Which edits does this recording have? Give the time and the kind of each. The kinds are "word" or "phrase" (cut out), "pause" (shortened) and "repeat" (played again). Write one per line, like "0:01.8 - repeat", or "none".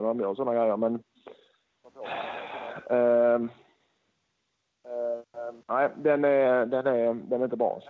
0:05.6 - pause